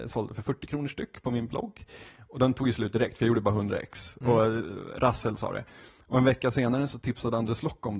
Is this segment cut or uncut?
uncut